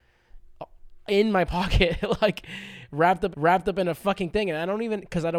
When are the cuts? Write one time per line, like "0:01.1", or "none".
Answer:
0:03.3